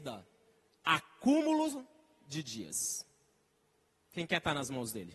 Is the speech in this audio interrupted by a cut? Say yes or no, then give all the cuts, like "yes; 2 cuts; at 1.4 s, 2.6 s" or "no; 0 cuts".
no; 0 cuts